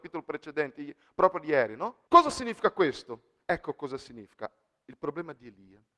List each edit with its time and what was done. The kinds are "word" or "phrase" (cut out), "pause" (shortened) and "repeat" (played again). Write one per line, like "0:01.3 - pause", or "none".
0:02.1 - pause
0:03.4 - pause